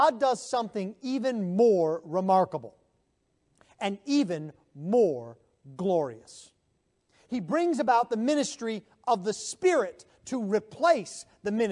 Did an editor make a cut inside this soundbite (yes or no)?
no